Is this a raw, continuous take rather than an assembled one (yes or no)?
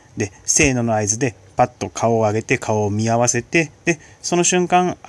no